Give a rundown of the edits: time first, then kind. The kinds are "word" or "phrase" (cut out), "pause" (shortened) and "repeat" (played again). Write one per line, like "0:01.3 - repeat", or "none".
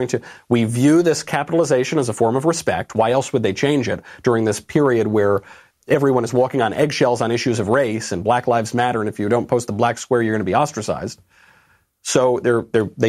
none

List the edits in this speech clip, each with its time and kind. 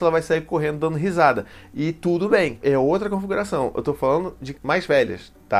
0:04.5 - word

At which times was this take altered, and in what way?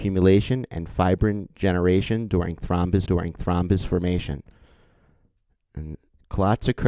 0:03.1 - repeat

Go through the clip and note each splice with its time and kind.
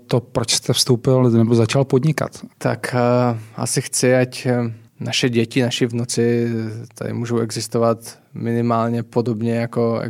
0:02.5 - pause
0:04.9 - pause

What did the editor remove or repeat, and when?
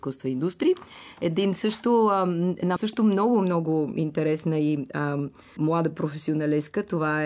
0:02.8 - word
0:05.6 - word

